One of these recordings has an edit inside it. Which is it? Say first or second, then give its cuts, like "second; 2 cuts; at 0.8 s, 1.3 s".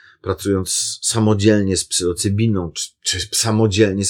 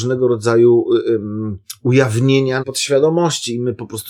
second; 1 cut; at 2.6 s